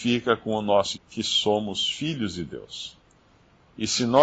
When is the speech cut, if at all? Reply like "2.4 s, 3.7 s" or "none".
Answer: 0.9 s